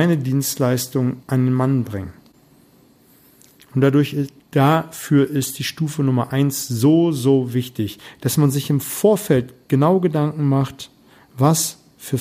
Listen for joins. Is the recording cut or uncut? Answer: cut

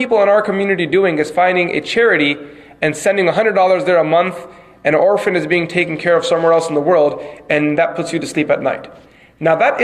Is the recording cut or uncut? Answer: uncut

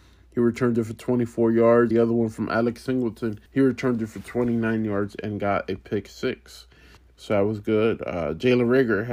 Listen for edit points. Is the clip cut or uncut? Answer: cut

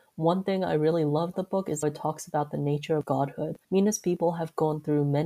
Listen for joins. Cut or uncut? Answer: cut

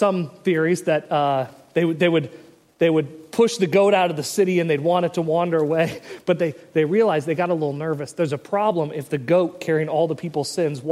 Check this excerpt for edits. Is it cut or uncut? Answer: uncut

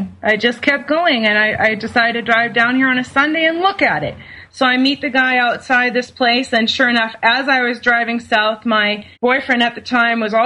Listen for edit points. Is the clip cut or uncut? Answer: cut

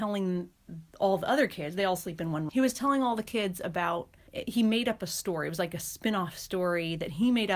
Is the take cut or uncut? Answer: cut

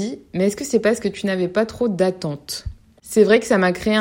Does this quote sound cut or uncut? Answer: uncut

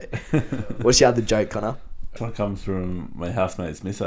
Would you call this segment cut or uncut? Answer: cut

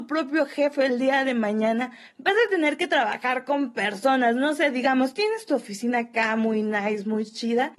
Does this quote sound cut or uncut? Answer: uncut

